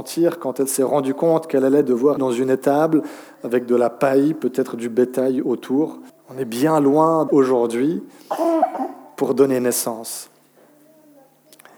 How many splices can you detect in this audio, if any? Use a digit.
3